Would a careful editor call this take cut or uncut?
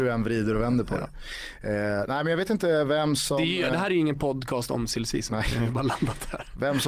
uncut